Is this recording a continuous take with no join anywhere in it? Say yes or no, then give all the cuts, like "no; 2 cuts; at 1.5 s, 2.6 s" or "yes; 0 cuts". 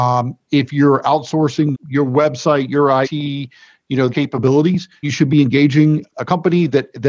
no; 5 cuts; at 1.7 s, 3.0 s, 4.1 s, 5.0 s, 6.1 s